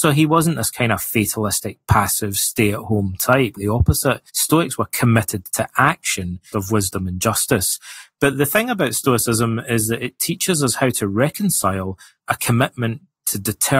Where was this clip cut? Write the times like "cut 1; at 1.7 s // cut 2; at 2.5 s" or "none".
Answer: cut 1; at 3.6 s // cut 2; at 4.3 s // cut 3; at 6.5 s // cut 4; at 8.3 s